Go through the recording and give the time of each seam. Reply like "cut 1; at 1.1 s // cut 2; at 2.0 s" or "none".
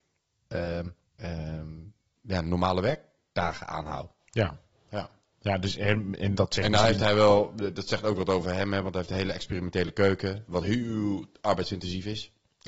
cut 1; at 1.1 s // cut 2; at 6.4 s